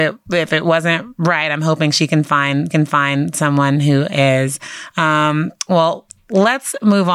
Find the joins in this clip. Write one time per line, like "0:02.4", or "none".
0:02.7